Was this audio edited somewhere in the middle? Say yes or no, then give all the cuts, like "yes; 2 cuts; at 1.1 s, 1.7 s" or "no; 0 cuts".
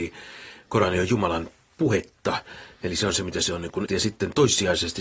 yes; 1 cut; at 3.9 s